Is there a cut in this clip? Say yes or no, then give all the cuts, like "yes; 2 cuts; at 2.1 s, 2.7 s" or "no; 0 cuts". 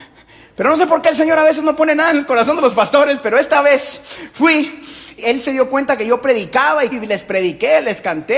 yes; 2 cuts; at 5.2 s, 6.9 s